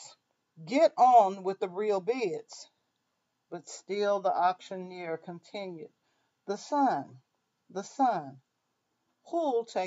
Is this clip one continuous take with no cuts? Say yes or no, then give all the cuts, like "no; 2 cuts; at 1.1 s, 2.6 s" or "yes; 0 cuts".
yes; 0 cuts